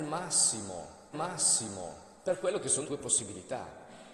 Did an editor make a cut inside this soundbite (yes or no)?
yes